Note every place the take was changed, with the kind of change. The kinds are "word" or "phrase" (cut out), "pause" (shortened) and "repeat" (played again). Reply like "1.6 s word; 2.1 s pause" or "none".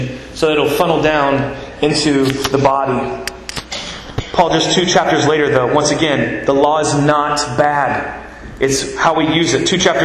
none